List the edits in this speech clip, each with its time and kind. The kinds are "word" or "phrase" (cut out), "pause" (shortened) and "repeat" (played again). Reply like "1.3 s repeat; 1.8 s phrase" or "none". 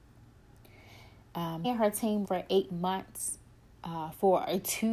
1.6 s phrase; 2.2 s word